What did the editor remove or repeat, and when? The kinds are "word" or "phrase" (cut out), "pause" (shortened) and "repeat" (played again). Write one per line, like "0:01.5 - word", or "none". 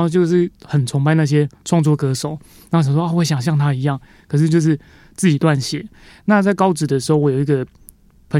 none